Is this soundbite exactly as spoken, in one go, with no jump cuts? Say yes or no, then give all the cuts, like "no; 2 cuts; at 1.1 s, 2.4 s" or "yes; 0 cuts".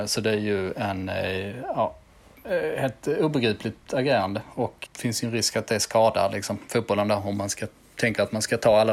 no; 1 cut; at 4.9 s